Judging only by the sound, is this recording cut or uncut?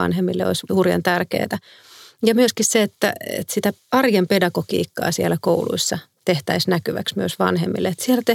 uncut